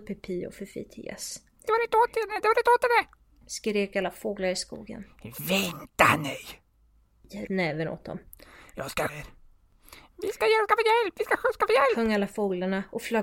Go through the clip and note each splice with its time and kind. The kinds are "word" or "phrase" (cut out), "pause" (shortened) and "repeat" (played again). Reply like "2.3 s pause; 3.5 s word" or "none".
7.5 s phrase; 9.1 s phrase